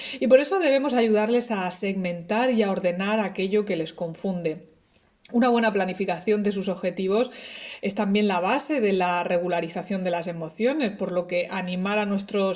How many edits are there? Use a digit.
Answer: 0